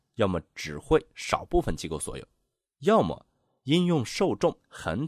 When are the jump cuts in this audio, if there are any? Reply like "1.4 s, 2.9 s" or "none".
none